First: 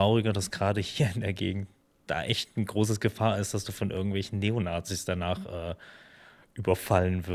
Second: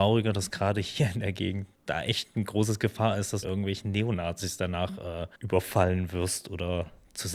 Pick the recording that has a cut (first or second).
second